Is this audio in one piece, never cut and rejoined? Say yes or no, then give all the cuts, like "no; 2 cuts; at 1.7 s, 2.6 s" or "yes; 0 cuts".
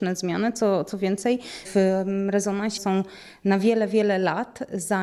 no; 2 cuts; at 1.6 s, 2.8 s